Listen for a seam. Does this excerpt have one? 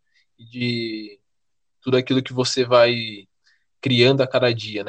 no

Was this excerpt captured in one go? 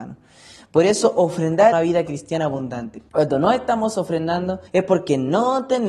no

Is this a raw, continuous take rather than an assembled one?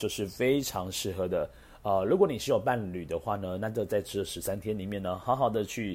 yes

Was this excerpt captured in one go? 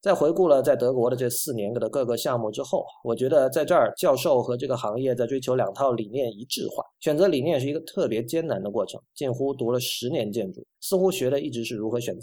no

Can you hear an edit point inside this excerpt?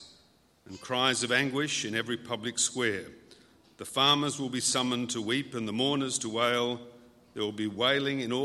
no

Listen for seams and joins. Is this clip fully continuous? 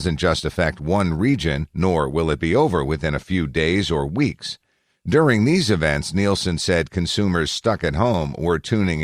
yes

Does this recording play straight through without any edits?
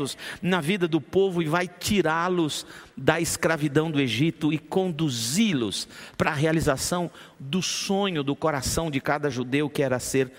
yes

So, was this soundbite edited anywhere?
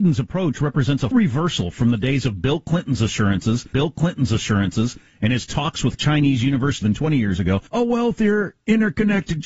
yes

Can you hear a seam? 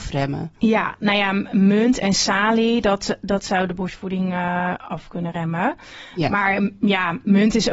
no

